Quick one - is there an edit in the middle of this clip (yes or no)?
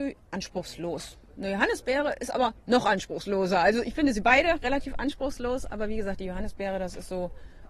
no